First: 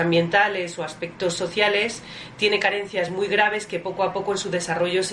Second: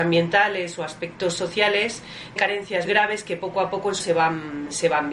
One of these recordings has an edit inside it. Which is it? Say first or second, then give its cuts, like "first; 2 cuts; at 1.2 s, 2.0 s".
second; 3 cuts; at 2.4 s, 2.8 s, 4.0 s